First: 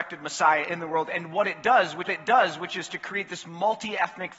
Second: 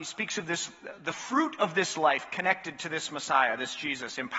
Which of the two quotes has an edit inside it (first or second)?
first